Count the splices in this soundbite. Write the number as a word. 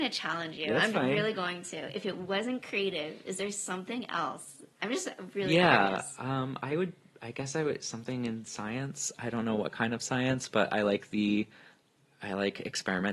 one